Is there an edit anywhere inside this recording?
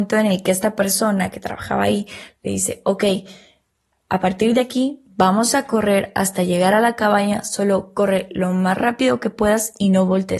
no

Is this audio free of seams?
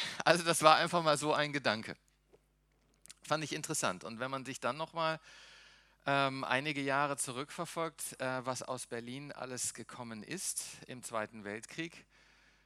yes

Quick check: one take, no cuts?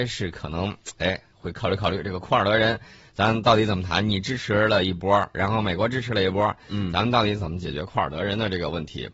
yes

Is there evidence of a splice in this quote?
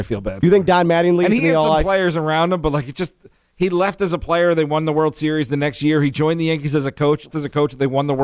yes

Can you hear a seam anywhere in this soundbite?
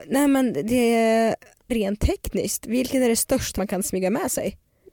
yes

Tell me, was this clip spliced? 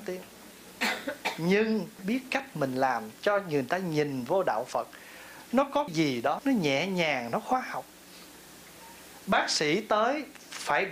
yes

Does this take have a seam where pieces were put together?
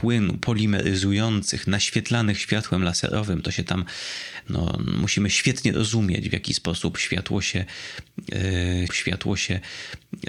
yes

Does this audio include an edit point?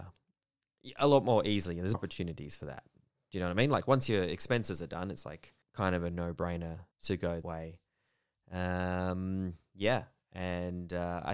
yes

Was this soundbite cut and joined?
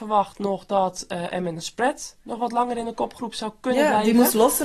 no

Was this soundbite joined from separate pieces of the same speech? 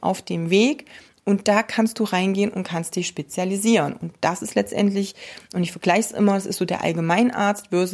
no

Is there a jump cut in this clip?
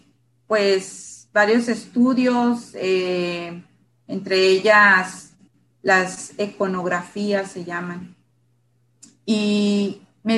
no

